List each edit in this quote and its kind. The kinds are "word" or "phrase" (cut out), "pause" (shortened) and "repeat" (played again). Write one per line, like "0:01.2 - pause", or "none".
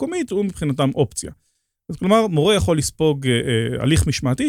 none